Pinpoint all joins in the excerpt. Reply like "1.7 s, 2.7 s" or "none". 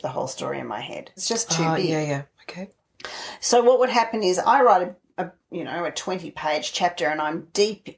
1.2 s